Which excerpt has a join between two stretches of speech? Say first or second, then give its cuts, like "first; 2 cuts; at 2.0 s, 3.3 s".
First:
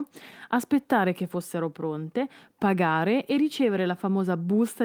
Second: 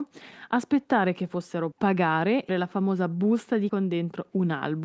second; 3 cuts; at 1.7 s, 2.5 s, 3.7 s